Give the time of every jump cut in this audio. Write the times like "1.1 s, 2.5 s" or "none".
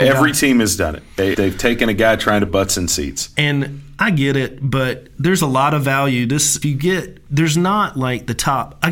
1.3 s, 2.5 s, 6.6 s